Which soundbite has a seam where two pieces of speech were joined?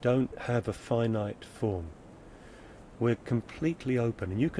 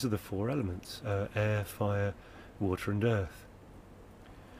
second; 1 cut; at 1.0 s

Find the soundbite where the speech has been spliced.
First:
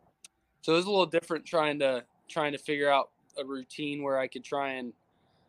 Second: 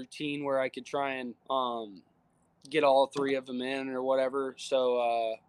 second; 1 cut; at 1.4 s

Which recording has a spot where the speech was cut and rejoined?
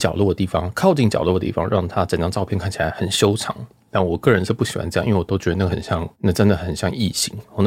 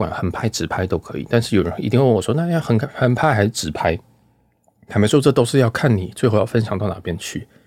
first; 1 cut; at 6.1 s

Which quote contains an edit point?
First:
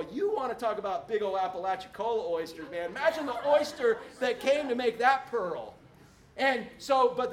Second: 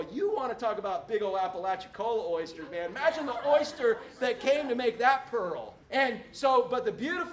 second; 1 cut; at 5.8 s

